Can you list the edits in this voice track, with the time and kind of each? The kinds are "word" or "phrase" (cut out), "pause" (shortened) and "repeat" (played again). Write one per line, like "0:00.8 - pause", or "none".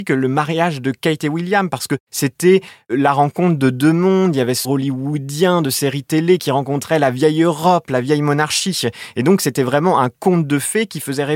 0:04.6 - phrase